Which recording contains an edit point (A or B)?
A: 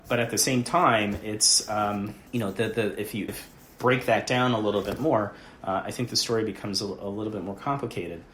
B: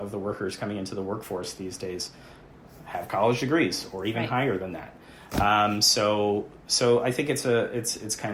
A